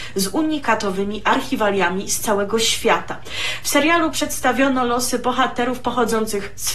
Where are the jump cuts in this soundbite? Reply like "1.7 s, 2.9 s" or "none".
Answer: none

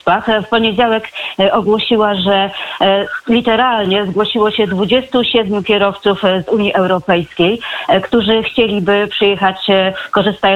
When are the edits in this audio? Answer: none

